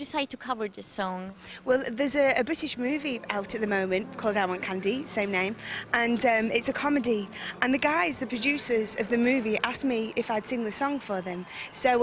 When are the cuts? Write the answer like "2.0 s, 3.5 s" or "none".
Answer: none

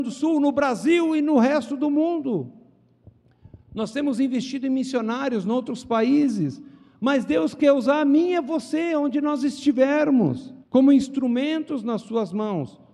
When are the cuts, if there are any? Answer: 10.6 s

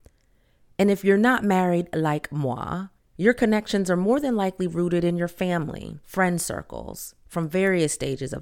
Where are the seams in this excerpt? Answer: 3.0 s, 6.0 s

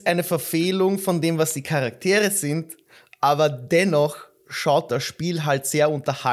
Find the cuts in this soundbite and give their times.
none

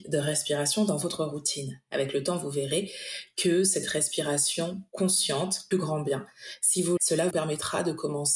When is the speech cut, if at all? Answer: 5.7 s, 7.0 s, 7.3 s

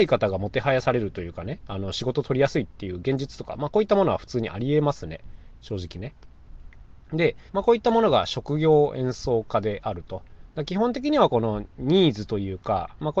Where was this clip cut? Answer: 7.5 s, 11.7 s

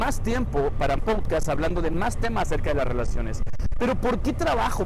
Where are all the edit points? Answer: 1.0 s

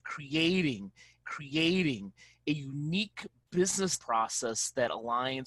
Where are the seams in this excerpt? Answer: 1.2 s, 4.0 s

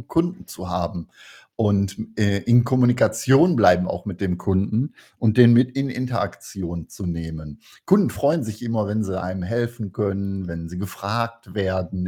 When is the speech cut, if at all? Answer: none

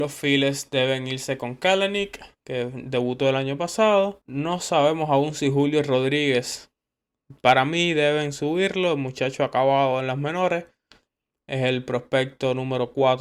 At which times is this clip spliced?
2.3 s, 4.2 s

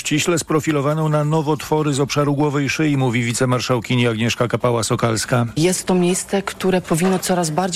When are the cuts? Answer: none

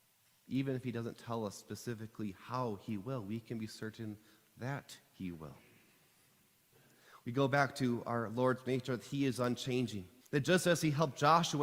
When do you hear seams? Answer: 10.2 s

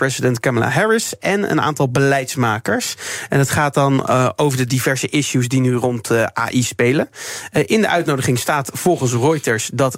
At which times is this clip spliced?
none

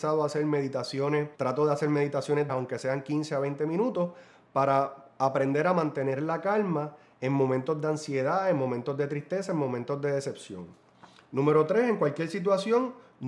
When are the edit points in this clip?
1.3 s, 2.5 s

